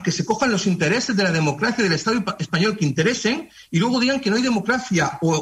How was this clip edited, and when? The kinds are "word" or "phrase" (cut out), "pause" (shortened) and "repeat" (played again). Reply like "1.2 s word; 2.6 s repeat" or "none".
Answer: none